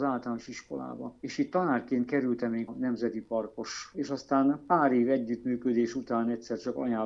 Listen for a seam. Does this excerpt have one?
yes; 2 cuts; at 2.7 s, 3.9 s

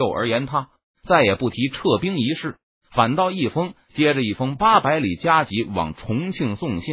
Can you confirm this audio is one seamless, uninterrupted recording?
yes; 0 cuts

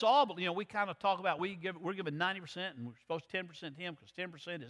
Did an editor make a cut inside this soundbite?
yes; 2 cuts; at 1.4 s, 3.3 s

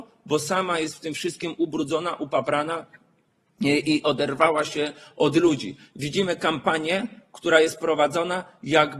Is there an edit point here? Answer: no; 0 cuts

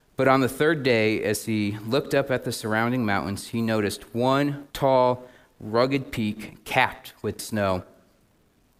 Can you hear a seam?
yes; 2 cuts; at 4.7 s, 7.4 s

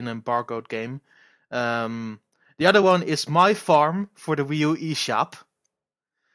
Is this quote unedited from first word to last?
yes; 0 cuts

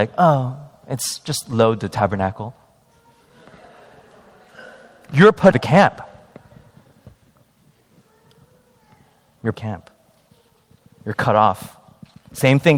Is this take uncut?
no; 2 cuts; at 5.5 s, 9.5 s

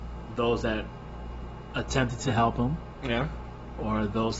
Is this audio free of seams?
yes; 0 cuts

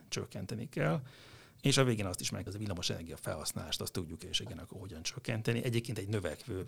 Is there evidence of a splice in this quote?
yes; 1 cut; at 2.5 s

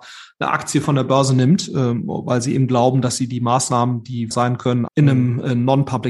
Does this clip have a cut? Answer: yes; 2 cuts; at 4.3 s, 4.9 s

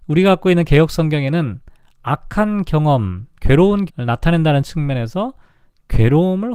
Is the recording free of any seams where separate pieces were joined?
no; 1 cut; at 3.9 s

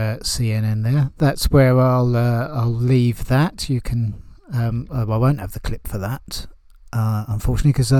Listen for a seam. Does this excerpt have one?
no; 0 cuts

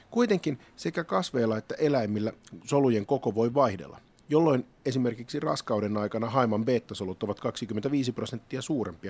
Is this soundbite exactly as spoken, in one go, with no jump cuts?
yes; 0 cuts

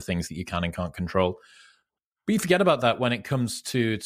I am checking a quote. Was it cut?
no; 0 cuts

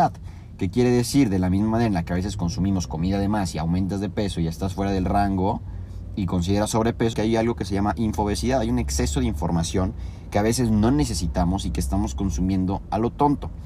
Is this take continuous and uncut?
no; 1 cut; at 7.1 s

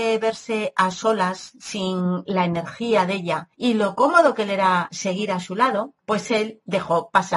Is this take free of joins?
no; 2 cuts; at 3.5 s, 6.0 s

